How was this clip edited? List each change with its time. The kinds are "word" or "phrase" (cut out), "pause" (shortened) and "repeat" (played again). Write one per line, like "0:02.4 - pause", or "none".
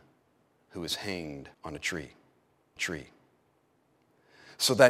0:01.5 - pause
0:02.8 - repeat